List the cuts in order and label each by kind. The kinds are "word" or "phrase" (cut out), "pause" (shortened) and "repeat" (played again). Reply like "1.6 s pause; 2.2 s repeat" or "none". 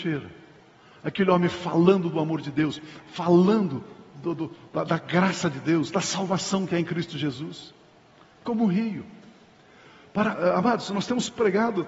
none